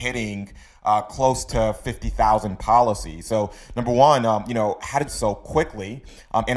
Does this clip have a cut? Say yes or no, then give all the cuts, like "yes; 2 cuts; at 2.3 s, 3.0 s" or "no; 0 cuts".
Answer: yes; 1 cut; at 5.1 s